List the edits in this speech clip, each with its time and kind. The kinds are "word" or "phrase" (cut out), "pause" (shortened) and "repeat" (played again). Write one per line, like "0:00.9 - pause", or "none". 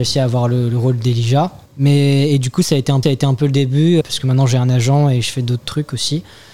0:01.7 - pause
0:03.0 - repeat
0:04.0 - word